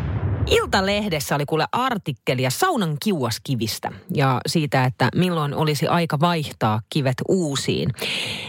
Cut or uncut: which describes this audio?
uncut